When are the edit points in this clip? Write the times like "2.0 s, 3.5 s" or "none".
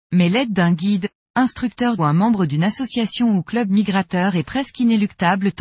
2.0 s